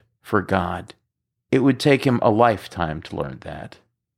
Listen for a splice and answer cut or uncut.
cut